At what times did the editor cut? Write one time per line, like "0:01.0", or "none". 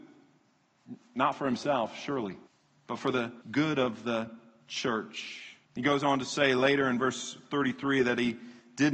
0:02.5
0:03.4
0:05.6